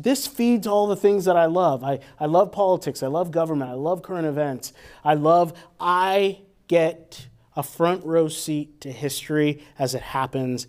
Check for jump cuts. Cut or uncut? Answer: uncut